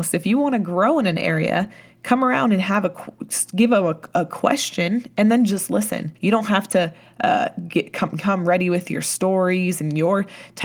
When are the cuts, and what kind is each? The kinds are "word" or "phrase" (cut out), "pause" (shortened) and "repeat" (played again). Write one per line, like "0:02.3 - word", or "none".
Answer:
0:06.2 - pause